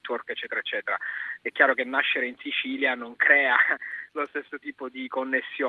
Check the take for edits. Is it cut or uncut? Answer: uncut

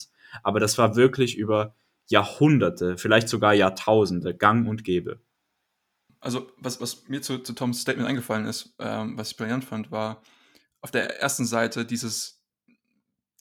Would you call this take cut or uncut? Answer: uncut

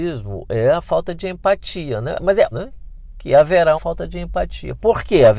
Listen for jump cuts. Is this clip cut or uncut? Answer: cut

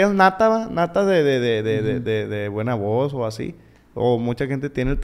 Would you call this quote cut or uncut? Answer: uncut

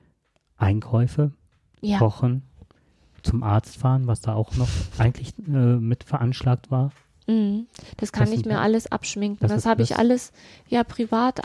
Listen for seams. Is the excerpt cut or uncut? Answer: uncut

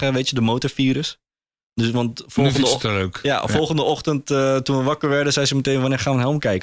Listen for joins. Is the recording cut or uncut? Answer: uncut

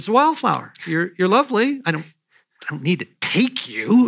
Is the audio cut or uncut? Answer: uncut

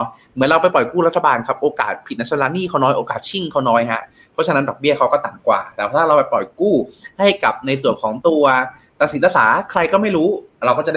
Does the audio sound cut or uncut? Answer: uncut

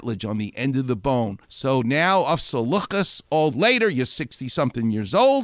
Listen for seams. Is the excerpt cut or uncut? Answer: cut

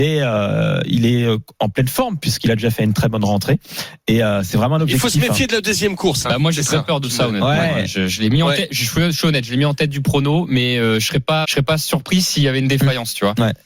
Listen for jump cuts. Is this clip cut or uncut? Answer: cut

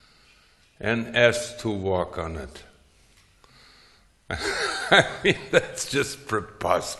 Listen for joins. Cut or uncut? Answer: uncut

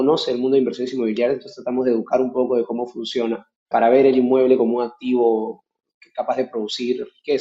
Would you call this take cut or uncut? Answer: cut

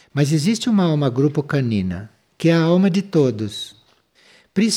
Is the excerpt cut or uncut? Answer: uncut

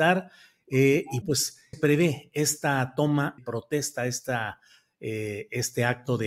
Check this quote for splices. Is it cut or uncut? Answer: cut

